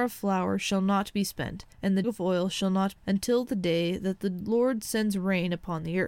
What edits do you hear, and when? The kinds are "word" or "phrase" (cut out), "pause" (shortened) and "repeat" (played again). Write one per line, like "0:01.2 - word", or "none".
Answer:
0:01.7 - pause
0:02.0 - word
0:03.0 - phrase